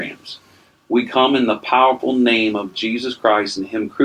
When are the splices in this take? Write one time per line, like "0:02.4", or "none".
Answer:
none